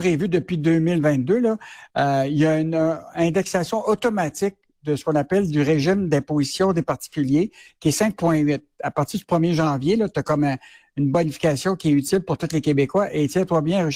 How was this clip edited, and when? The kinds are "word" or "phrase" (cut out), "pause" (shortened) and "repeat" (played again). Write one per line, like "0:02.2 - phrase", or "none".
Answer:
none